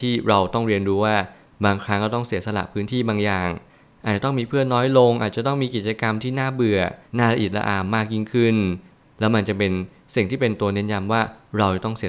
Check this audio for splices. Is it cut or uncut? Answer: cut